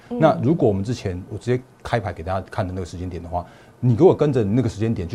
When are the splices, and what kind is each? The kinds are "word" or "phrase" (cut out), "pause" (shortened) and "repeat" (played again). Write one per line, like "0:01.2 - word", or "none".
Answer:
0:01.3 - word
0:01.7 - pause